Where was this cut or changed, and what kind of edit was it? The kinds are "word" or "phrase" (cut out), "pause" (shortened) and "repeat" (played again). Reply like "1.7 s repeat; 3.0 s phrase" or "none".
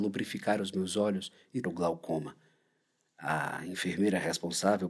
1.6 s word